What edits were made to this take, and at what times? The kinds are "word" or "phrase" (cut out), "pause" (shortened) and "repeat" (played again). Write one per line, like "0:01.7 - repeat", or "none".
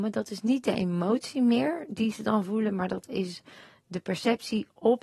none